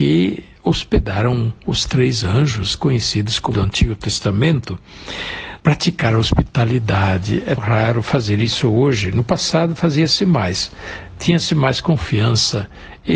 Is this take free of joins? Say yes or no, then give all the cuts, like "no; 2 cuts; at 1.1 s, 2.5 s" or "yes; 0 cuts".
no; 3 cuts; at 3.5 s, 5.6 s, 7.6 s